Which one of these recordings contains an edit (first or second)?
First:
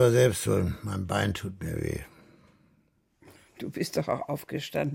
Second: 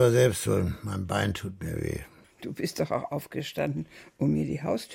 second